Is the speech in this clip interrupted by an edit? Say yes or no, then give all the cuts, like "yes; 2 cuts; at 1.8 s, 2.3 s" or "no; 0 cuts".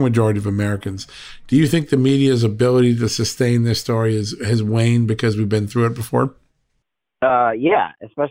no; 0 cuts